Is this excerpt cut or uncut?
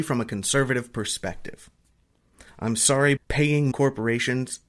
cut